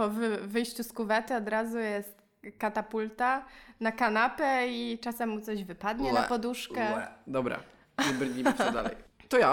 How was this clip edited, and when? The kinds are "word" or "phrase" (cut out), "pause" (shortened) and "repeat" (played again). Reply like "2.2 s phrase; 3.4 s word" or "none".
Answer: none